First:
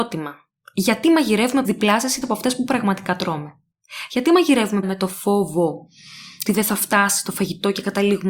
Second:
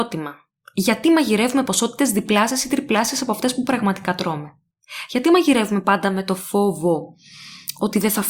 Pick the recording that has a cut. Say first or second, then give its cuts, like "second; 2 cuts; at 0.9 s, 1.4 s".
first; 4 cuts; at 1.6 s, 2.2 s, 4.8 s, 6.5 s